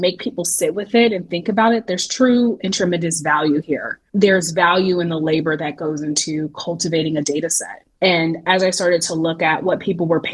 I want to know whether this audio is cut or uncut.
cut